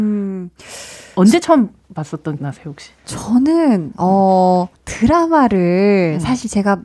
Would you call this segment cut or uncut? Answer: cut